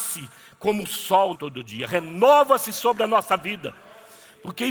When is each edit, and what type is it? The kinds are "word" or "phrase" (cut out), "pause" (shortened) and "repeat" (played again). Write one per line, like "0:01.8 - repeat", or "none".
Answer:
0:01.3 - word